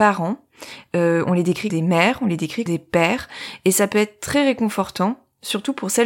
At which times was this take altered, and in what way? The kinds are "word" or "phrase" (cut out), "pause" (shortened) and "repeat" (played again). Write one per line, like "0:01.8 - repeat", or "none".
0:01.7 - word
0:02.7 - word